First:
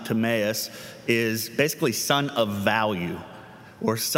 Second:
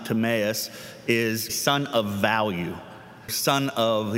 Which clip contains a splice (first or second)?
second